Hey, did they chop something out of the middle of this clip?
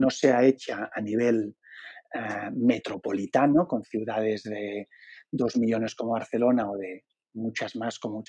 no; 0 cuts

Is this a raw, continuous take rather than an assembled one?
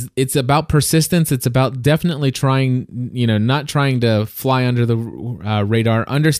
yes; 0 cuts

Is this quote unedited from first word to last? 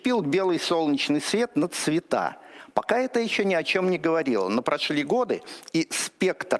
yes; 0 cuts

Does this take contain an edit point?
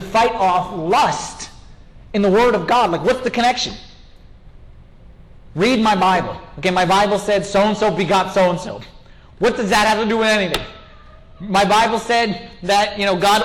no; 0 cuts

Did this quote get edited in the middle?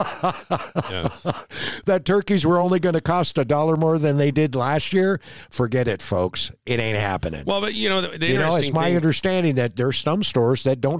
no; 0 cuts

